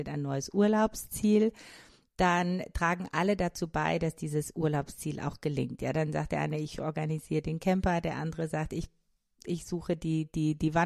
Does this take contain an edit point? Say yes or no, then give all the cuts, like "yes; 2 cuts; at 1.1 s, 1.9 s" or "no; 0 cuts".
no; 0 cuts